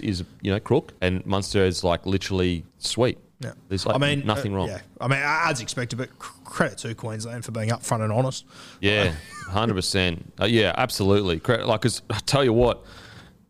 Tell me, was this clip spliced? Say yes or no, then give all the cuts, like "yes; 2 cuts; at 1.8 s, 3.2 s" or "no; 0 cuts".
yes; 2 cuts; at 1.0 s, 2.7 s